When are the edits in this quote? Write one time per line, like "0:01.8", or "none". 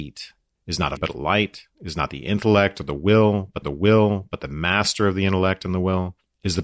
0:01.0
0:01.7
0:03.6